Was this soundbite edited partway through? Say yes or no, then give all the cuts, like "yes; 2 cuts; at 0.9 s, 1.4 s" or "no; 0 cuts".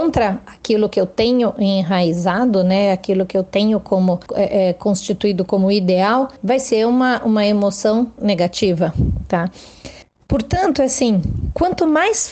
yes; 3 cuts; at 4.3 s, 6.4 s, 10.0 s